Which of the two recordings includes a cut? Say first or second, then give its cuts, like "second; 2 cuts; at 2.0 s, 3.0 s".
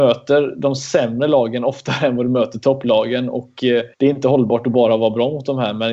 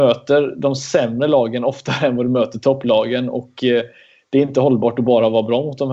first; 1 cut; at 3.9 s